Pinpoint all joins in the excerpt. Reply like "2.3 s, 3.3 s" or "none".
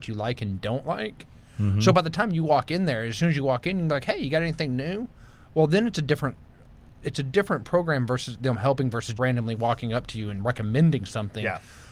9.2 s